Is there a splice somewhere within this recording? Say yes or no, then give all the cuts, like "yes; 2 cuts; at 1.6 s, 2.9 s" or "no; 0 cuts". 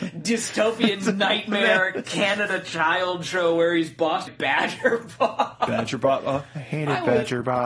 yes; 1 cut; at 4.3 s